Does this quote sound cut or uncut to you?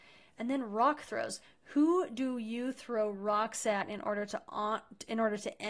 uncut